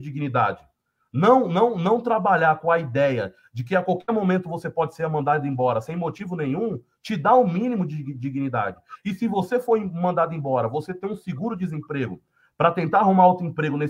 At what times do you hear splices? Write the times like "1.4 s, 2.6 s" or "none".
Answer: none